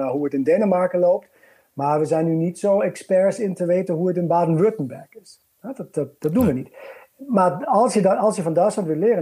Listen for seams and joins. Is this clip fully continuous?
yes; 0 cuts

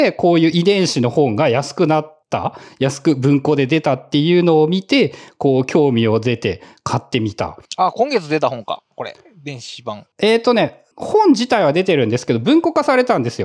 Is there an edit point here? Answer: yes; 4 cuts; at 2.2 s, 7.6 s, 10.1 s, 10.9 s

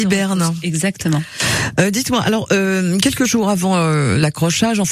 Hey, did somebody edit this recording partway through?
no; 0 cuts

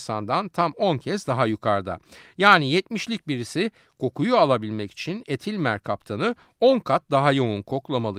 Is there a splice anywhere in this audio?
no; 0 cuts

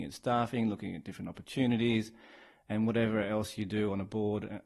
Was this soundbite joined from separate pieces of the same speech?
no; 0 cuts

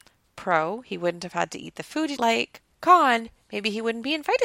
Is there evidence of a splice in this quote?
yes; 2 cuts; at 2.2 s, 2.7 s

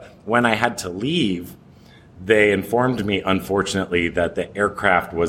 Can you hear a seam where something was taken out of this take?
no; 0 cuts

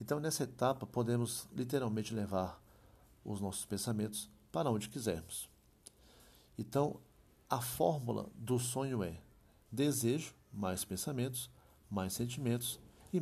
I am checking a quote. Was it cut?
no; 0 cuts

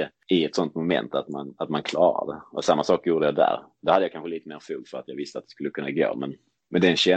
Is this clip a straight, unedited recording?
yes; 0 cuts

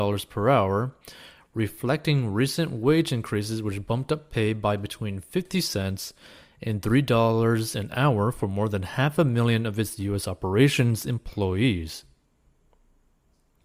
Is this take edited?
no; 0 cuts

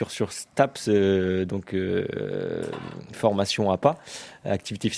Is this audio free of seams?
yes; 0 cuts

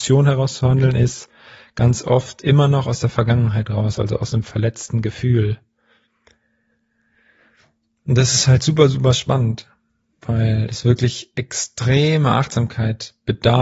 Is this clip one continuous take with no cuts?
yes; 0 cuts

